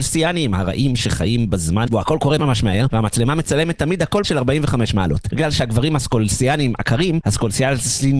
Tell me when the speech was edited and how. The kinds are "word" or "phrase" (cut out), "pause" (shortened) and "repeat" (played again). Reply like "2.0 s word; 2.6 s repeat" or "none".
1.9 s word; 2.4 s word; 4.2 s word